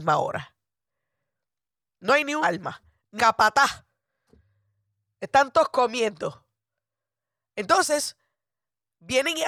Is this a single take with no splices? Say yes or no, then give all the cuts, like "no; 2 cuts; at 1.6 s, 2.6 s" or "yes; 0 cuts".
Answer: no; 2 cuts; at 2.4 s, 3.2 s